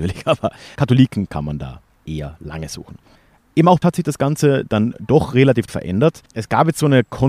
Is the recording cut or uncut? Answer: cut